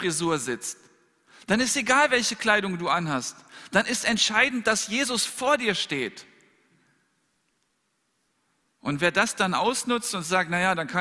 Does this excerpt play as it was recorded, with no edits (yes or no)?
yes